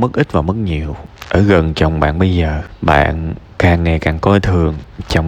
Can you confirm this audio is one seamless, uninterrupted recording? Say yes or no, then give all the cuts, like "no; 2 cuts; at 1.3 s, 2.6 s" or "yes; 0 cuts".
yes; 0 cuts